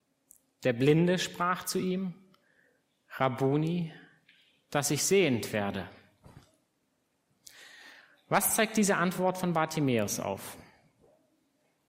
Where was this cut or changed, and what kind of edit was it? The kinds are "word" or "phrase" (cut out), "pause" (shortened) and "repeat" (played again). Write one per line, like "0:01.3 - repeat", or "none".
none

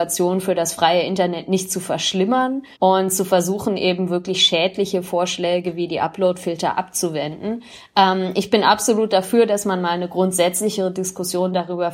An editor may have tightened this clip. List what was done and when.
0:02.7 - pause

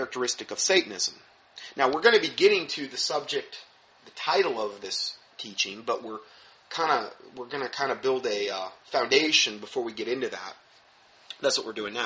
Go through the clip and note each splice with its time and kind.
none

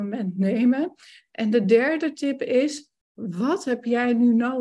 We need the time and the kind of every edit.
none

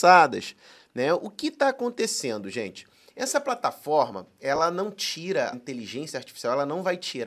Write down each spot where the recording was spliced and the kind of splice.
0:05.5 - word

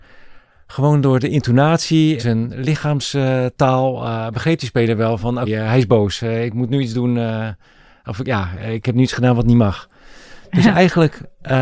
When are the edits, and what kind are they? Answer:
0:02.2 - word
0:05.4 - word

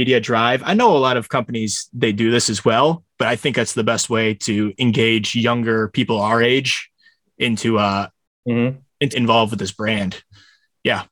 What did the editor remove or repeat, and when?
0:09.1 - word

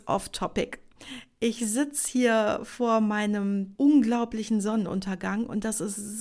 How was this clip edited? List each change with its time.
0:03.7 - word

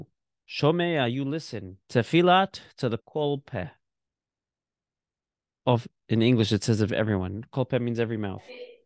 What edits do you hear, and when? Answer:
0:01.8 - pause
0:03.0 - word
0:06.0 - pause

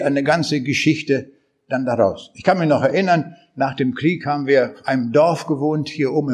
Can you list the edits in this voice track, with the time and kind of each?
none

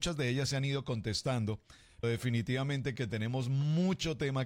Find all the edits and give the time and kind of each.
0:02.0 - word
0:03.0 - word

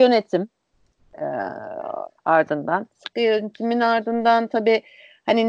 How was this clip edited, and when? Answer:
0:02.2 - word

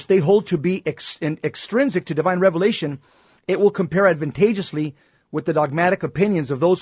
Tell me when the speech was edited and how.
none

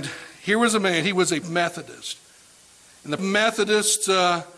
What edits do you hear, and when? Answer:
0:01.4 - word
0:03.2 - word

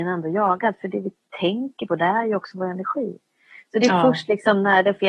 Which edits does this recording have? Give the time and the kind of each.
none

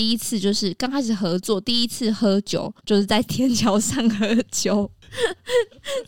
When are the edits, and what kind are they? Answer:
0:02.8 - pause

